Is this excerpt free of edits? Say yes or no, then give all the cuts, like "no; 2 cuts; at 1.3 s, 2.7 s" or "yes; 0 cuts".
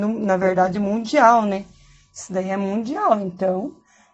yes; 0 cuts